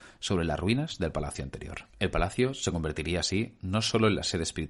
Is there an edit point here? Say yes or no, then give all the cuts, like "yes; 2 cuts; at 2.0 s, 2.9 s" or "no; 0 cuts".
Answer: yes; 1 cut; at 1.9 s